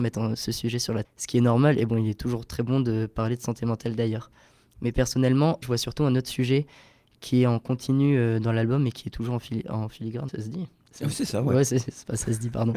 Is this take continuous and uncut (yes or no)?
no